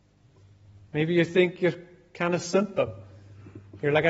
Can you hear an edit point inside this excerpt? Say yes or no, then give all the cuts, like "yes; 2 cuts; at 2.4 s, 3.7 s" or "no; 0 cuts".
no; 0 cuts